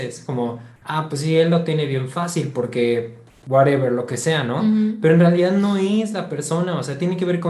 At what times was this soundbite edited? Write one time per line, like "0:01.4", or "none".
none